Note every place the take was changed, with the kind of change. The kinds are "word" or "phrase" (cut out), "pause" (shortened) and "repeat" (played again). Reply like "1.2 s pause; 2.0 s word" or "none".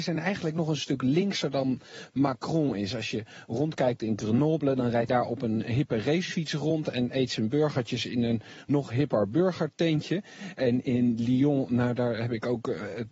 5.1 s word